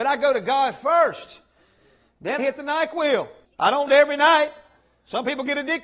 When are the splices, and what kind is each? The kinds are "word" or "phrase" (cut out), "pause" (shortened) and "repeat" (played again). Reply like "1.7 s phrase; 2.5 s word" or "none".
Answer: 2.4 s word; 3.4 s pause; 3.9 s word